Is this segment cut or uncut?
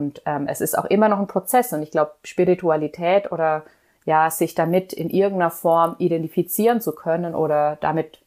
uncut